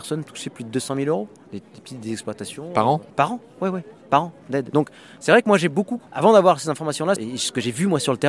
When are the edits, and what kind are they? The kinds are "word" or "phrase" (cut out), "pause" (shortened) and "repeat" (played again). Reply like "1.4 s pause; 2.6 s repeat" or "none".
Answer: 3.1 s pause; 6.1 s pause; 7.2 s phrase